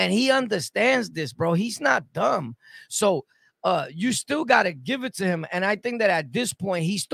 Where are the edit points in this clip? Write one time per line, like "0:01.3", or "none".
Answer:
none